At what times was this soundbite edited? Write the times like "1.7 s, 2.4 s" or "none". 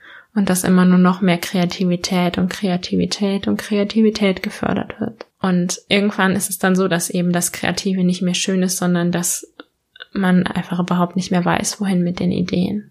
5.3 s